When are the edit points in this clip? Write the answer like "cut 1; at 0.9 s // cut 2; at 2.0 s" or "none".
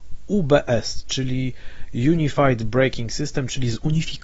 none